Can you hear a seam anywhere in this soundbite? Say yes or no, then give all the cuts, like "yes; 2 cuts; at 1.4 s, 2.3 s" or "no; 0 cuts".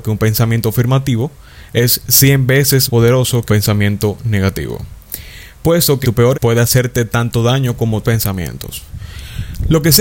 yes; 5 cuts; at 2.9 s, 3.5 s, 6.0 s, 6.3 s, 8.0 s